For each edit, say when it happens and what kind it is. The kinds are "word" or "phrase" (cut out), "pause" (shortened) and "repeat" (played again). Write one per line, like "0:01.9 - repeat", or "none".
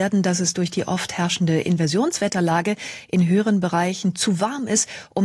none

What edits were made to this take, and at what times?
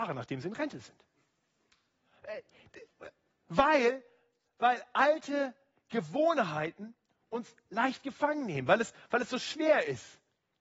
none

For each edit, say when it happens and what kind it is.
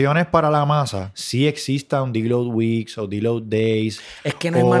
none

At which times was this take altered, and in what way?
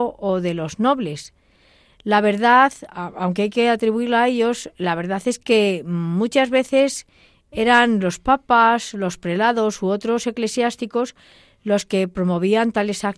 none

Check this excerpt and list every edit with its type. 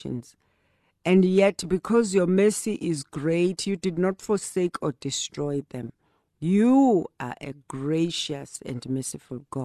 none

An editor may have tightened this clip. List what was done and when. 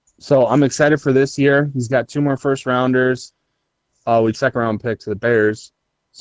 0:04.3 - phrase

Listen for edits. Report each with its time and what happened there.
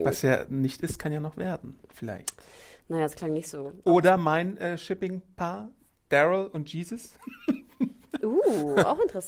none

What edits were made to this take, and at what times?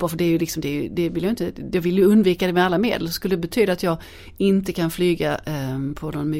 none

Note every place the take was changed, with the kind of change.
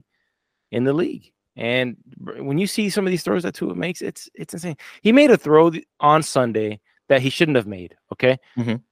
0:05.9 - pause

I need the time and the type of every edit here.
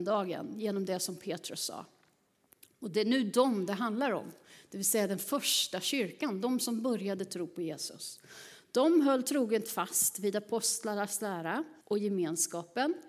0:11.8 - pause

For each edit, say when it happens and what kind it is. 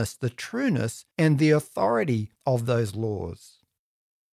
0:01.1 - pause
0:02.4 - pause

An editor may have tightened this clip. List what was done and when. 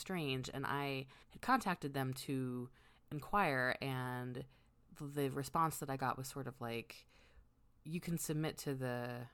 0:01.2 - pause

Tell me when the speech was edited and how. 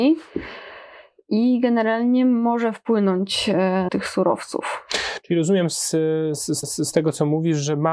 0:03.9 - phrase
0:06.6 - repeat

